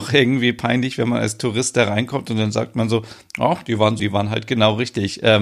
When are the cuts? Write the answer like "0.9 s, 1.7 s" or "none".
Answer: 4.0 s